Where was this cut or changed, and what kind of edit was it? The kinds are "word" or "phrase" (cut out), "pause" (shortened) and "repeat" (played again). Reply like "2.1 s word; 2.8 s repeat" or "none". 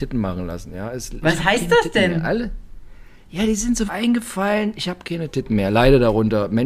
1.2 s word; 3.9 s word